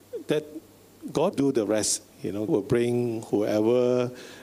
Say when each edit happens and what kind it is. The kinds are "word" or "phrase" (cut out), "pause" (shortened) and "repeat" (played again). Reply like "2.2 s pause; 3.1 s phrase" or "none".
1.3 s word; 2.5 s word